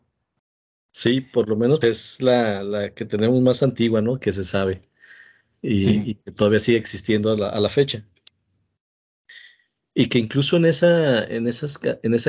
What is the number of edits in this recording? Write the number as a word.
one